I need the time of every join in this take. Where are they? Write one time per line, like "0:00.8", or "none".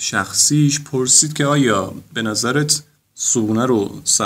none